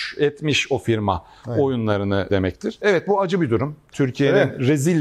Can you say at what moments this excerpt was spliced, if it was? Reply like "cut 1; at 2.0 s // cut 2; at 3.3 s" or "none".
none